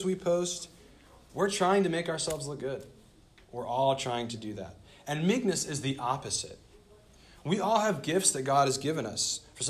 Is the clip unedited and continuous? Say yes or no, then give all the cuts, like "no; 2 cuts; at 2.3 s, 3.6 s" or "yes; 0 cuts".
yes; 0 cuts